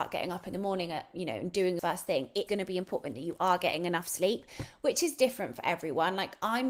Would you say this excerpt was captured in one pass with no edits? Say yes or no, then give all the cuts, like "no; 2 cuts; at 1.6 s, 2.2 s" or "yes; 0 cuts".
no; 2 cuts; at 1.8 s, 2.5 s